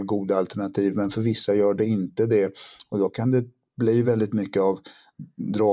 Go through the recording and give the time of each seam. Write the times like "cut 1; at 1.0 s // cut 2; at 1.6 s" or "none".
none